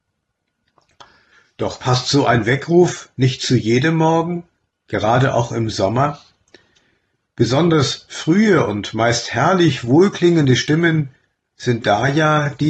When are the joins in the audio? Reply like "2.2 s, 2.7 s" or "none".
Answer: none